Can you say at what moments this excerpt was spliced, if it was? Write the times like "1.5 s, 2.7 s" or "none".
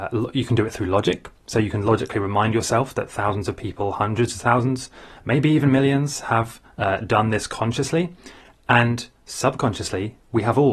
none